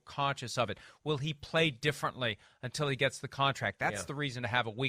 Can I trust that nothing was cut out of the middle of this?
yes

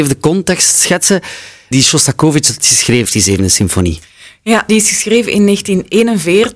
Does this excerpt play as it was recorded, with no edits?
no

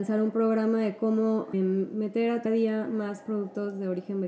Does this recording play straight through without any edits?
no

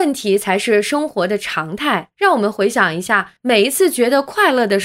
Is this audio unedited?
no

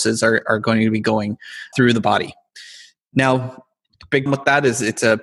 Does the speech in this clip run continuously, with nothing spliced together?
no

